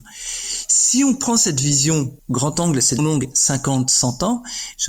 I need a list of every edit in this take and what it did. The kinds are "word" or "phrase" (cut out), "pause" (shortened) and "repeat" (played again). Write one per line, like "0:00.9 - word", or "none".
0:02.2 - pause
0:03.0 - word